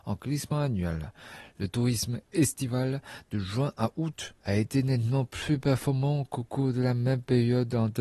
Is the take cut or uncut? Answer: uncut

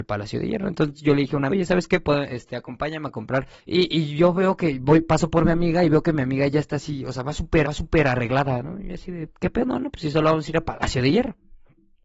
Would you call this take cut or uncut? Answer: cut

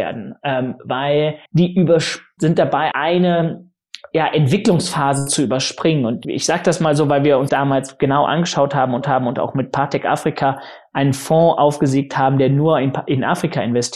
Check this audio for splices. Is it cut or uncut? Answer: cut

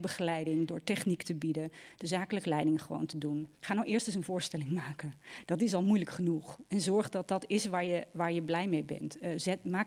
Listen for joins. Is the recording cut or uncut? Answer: cut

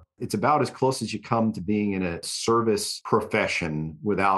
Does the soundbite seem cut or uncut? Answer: uncut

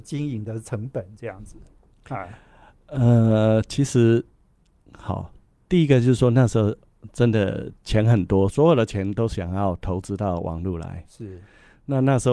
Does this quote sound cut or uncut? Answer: uncut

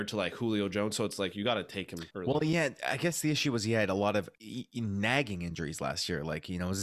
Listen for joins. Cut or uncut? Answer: cut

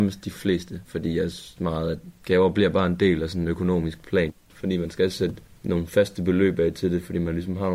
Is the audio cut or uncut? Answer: cut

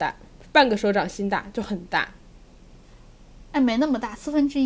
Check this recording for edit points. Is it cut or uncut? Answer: uncut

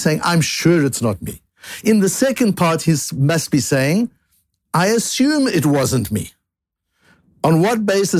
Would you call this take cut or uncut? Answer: uncut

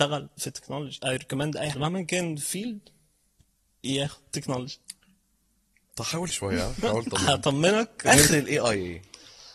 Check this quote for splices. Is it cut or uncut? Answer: cut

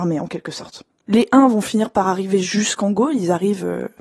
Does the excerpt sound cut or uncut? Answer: uncut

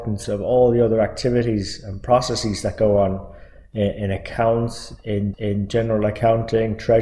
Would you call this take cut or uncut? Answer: cut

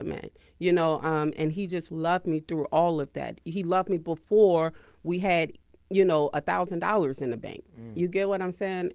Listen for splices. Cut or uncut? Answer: uncut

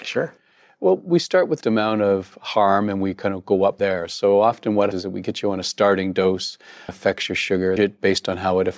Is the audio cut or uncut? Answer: cut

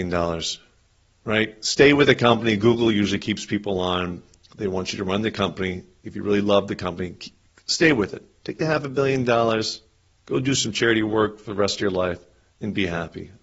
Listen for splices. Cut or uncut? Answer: uncut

